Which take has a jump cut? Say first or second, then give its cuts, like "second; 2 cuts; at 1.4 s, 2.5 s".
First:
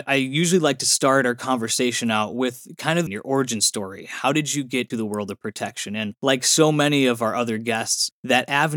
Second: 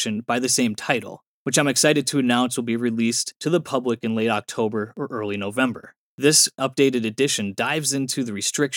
first; 2 cuts; at 3.1 s, 4.9 s